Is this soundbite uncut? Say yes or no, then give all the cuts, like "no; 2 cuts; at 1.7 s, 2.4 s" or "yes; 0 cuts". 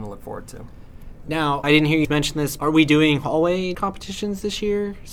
no; 4 cuts; at 1.6 s, 2.0 s, 2.6 s, 3.7 s